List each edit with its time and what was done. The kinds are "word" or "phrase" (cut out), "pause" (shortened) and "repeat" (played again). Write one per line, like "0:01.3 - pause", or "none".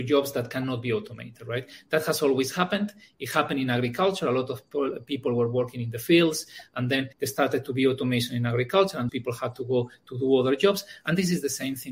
0:07.1 - pause
0:09.1 - word